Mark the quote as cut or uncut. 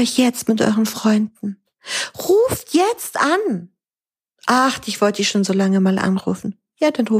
uncut